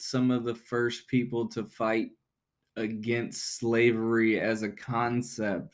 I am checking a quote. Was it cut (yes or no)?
no